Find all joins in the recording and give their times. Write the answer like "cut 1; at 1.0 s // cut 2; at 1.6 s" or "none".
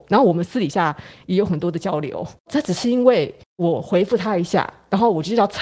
cut 1; at 2.4 s // cut 2; at 3.4 s